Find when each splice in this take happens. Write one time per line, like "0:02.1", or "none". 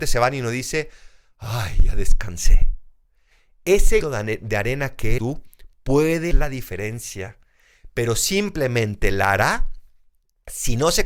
0:04.0
0:05.2
0:06.3

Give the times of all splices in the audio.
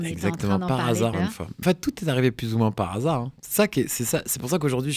0:01.1
0:01.6

